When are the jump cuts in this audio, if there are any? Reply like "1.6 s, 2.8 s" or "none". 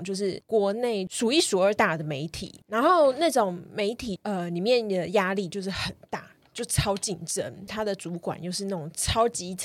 7.7 s